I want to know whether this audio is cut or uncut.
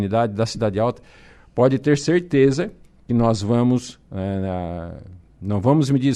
uncut